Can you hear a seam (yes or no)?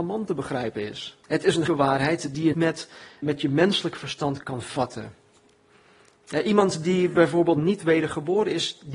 yes